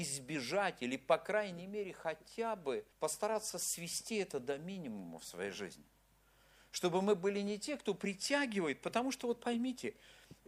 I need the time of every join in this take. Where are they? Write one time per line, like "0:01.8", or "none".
0:02.9